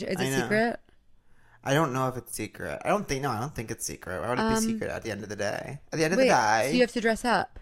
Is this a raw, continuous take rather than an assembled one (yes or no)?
yes